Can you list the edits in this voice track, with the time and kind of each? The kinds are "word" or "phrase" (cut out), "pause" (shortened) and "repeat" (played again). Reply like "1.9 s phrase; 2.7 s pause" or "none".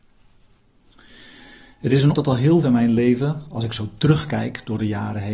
2.1 s word; 2.6 s word